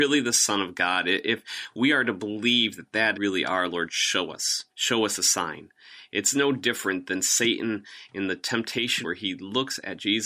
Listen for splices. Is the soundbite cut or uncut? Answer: cut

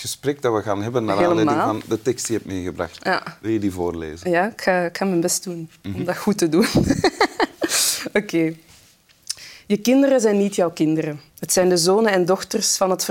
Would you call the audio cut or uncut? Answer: cut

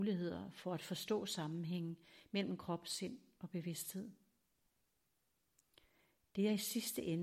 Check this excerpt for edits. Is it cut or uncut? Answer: uncut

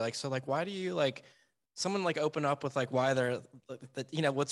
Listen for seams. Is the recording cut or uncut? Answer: uncut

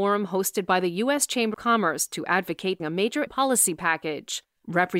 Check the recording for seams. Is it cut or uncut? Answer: cut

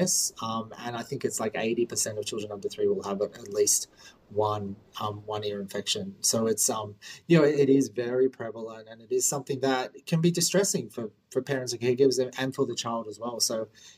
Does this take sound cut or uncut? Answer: uncut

